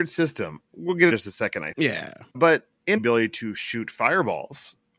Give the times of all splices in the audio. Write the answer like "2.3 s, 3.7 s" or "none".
1.1 s, 1.7 s, 2.3 s, 3.0 s